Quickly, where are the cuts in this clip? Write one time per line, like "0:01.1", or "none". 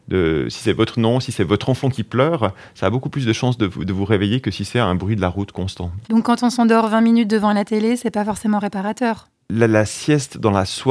0:06.0

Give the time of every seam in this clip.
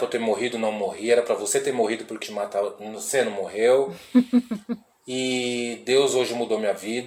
0:02.2

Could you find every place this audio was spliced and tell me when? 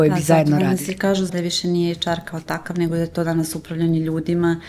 0:01.3

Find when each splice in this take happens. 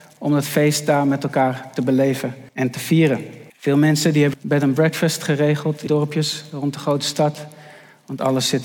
0:02.5
0:03.5
0:04.3
0:05.9

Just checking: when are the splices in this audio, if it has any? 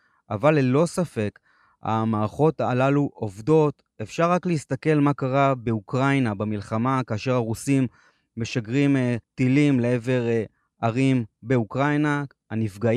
0:09.2

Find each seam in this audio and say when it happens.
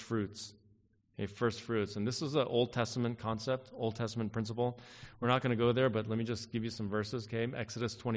none

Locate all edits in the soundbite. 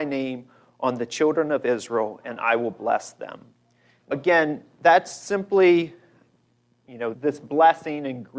0:04.1
0:07.1

